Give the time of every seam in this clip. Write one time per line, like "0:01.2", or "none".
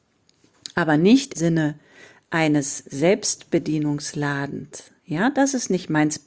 0:01.3
0:05.0